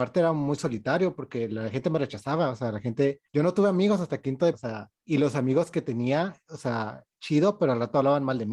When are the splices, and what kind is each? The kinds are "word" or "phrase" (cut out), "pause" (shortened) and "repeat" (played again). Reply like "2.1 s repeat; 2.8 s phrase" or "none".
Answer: 3.2 s pause; 4.5 s word; 5.0 s pause